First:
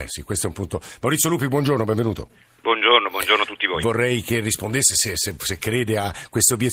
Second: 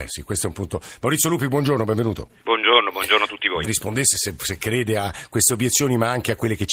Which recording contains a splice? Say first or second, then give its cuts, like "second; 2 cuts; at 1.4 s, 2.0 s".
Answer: second; 3 cuts; at 2.4 s, 3.6 s, 4.1 s